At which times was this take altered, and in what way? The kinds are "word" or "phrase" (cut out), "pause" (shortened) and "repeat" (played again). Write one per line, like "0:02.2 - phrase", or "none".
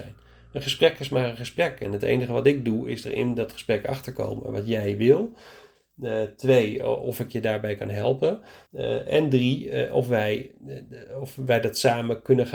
0:08.6 - pause